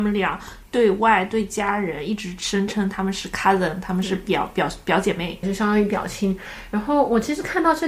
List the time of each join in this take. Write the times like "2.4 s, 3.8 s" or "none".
5.4 s